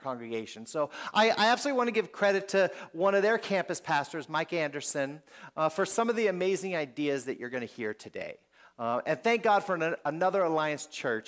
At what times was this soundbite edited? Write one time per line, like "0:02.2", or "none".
none